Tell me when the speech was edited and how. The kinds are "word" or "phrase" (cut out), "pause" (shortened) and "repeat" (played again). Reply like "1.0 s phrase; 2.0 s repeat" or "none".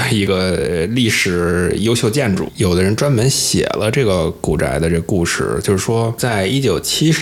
none

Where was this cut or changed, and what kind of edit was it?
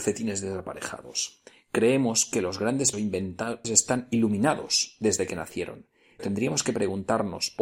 2.9 s word; 3.6 s word; 6.2 s word

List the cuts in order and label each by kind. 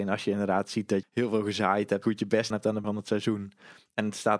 1.0 s word; 2.0 s word; 2.5 s word; 2.8 s word

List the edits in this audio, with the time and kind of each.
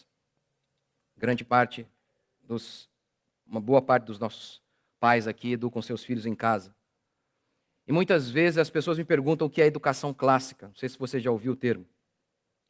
none

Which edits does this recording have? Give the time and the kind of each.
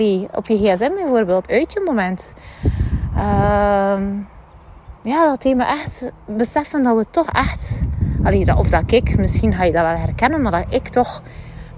1.4 s phrase; 5.0 s pause; 7.3 s word

